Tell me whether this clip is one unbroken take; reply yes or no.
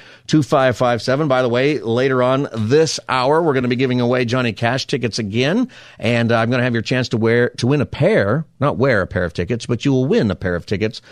yes